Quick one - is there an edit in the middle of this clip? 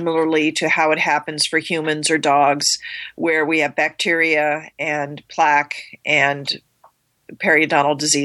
no; 0 cuts

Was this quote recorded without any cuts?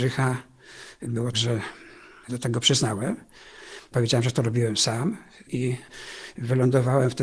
no; 2 cuts; at 1.3 s, 2.2 s

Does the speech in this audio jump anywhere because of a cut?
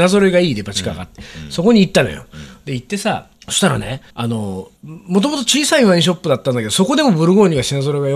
yes; 3 cuts; at 3.3 s, 4.1 s, 4.8 s

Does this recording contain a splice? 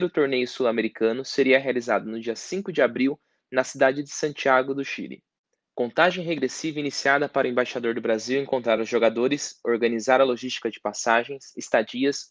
no; 0 cuts

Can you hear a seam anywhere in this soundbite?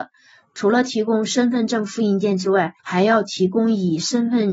yes; 1 cut; at 2.8 s

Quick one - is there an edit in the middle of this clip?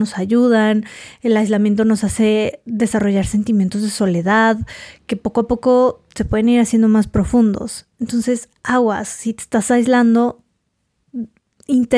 yes; 1 cut; at 8.6 s

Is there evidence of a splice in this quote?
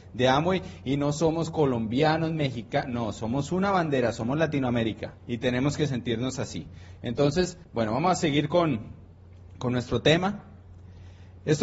yes; 2 cuts; at 5.2 s, 7.6 s

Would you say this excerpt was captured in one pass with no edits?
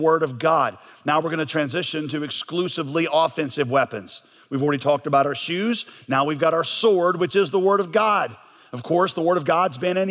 yes; 0 cuts

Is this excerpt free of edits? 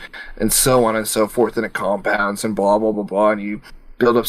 no; 1 cut; at 2.9 s

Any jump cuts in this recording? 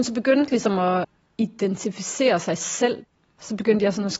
no; 0 cuts

